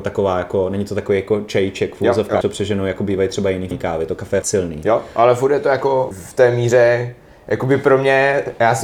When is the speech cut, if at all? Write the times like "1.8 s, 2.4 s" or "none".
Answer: 2.4 s, 3.7 s, 4.4 s, 6.1 s